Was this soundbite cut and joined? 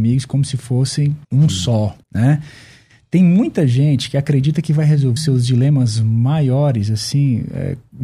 yes; 3 cuts; at 1.2 s, 2.0 s, 5.2 s

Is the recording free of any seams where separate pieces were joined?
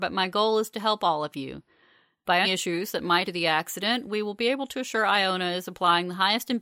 no; 2 cuts; at 2.4 s, 3.3 s

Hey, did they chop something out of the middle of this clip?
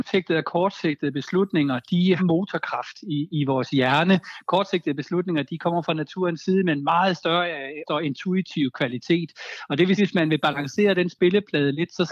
yes; 3 cuts; at 2.2 s, 7.9 s, 10.0 s

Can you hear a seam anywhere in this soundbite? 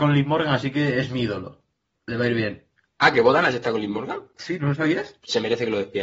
no; 0 cuts

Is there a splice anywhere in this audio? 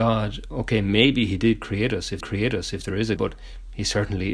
yes; 2 cuts; at 2.2 s, 3.2 s

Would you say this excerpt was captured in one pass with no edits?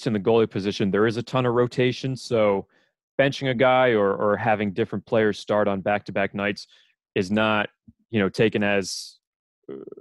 yes; 0 cuts

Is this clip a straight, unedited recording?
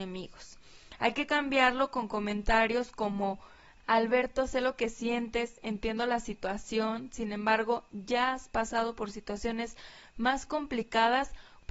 yes; 0 cuts

